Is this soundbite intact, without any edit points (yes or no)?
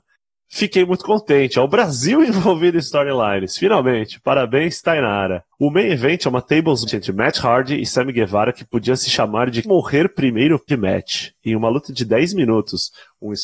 no